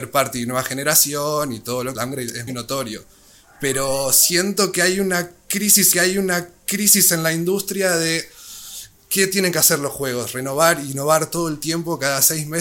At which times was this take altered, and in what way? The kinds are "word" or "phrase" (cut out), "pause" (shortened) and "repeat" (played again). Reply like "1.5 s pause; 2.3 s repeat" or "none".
2.0 s phrase; 2.5 s word; 5.9 s repeat